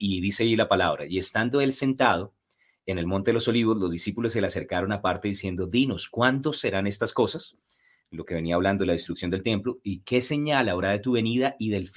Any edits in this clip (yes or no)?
no